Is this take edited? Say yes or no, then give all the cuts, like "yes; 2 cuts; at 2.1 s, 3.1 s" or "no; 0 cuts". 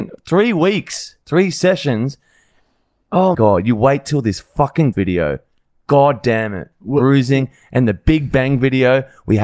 yes; 3 cuts; at 1.2 s, 3.3 s, 4.9 s